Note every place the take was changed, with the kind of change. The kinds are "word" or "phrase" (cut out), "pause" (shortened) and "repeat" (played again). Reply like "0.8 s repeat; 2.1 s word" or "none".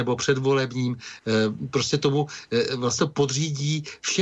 3.0 s word